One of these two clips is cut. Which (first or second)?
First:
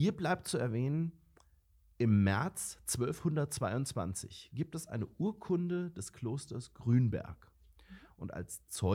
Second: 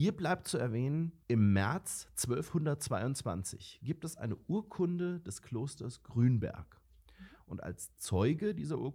second